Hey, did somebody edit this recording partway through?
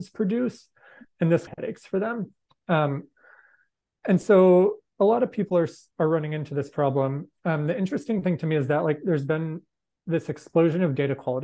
yes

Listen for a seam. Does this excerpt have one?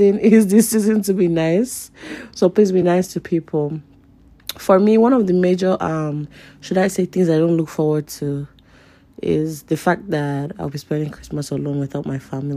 no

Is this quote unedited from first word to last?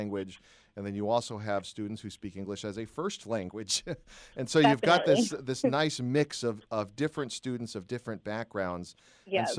yes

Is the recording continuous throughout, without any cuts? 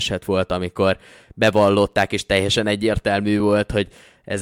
yes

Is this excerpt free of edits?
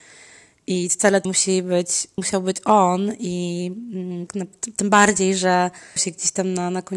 no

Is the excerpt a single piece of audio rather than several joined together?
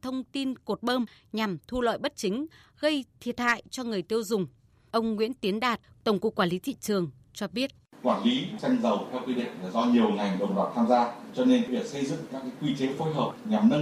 yes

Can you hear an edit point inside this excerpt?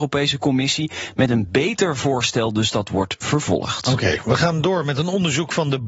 no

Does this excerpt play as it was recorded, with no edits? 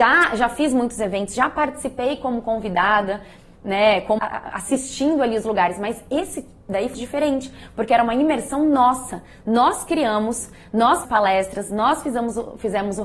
no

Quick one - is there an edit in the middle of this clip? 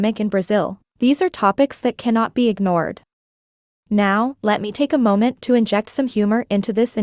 no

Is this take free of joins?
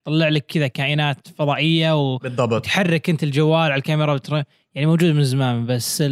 yes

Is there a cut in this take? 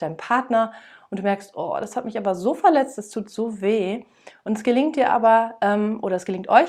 no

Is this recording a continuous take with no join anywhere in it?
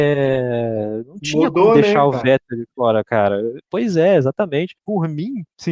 no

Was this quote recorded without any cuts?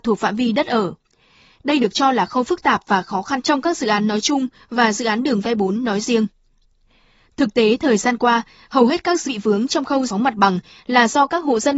no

